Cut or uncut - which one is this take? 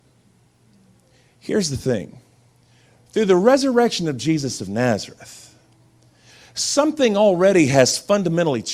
uncut